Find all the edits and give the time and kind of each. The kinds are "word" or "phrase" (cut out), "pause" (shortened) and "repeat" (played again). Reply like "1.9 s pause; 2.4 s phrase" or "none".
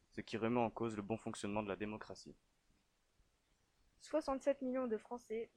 none